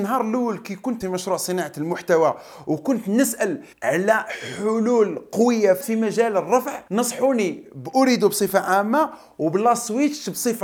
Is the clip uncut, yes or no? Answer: no